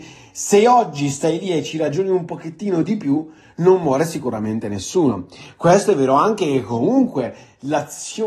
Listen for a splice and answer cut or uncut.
uncut